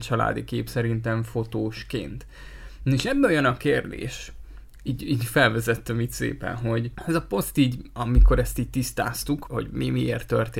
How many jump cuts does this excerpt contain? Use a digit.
1